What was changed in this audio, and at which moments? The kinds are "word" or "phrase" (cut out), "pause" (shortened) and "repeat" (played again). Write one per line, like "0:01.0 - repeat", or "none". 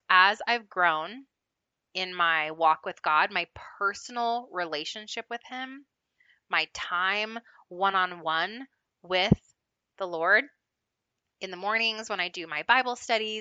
none